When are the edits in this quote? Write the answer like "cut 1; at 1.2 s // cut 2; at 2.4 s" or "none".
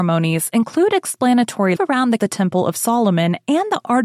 cut 1; at 1.8 s // cut 2; at 2.2 s